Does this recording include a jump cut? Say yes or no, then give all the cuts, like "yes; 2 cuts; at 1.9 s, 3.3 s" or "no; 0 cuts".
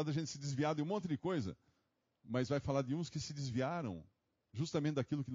no; 0 cuts